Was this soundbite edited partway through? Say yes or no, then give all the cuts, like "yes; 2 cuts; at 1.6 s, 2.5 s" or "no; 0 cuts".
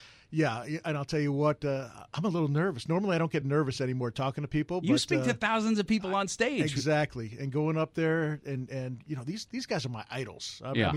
no; 0 cuts